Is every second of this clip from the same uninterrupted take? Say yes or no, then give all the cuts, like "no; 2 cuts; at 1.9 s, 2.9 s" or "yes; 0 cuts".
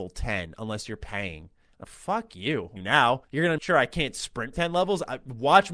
no; 5 cuts; at 1.8 s, 2.8 s, 3.2 s, 3.6 s, 4.5 s